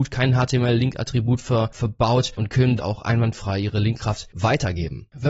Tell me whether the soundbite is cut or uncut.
cut